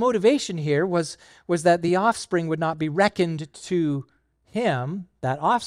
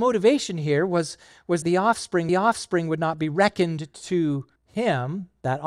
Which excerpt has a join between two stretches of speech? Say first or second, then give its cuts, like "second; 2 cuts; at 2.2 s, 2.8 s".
second; 3 cuts; at 1.6 s, 2.3 s, 4.6 s